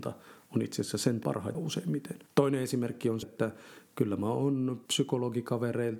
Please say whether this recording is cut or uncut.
cut